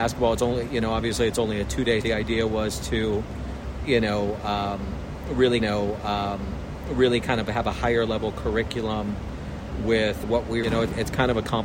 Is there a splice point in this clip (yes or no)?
yes